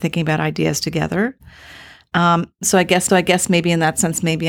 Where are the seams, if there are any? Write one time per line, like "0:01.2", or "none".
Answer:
0:03.1